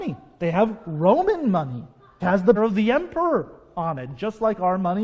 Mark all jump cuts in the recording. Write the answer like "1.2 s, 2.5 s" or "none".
2.2 s, 2.6 s